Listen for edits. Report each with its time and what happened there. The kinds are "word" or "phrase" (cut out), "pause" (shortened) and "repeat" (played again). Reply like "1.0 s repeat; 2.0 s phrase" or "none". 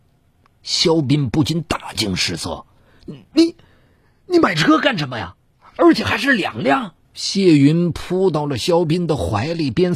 7.0 s pause

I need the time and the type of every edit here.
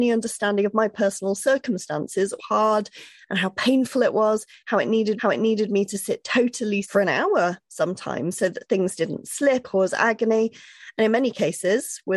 2.4 s phrase; 5.2 s repeat; 6.8 s word; 9.6 s word

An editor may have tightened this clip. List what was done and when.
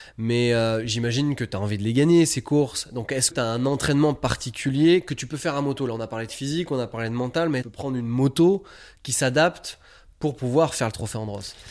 3.3 s phrase; 7.6 s phrase

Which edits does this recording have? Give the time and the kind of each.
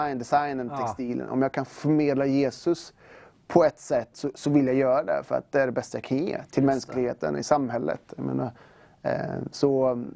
none

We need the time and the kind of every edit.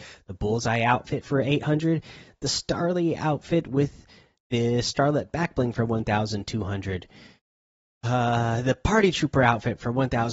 none

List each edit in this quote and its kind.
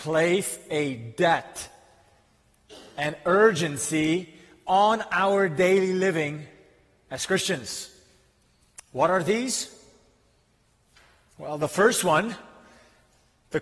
none

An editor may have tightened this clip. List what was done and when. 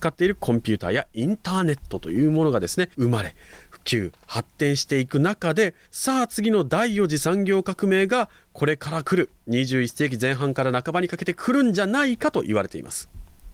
2.9 s pause; 5.8 s pause

